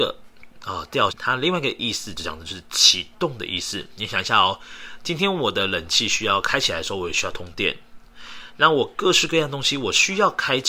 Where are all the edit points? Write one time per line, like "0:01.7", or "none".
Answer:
0:01.1